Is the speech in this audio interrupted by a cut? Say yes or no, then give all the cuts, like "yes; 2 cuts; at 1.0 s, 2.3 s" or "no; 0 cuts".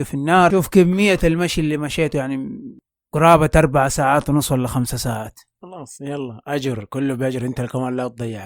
no; 0 cuts